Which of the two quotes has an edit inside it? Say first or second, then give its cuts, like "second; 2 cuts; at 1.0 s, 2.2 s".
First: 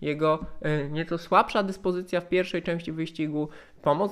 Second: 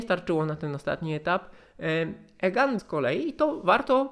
second; 1 cut; at 2.8 s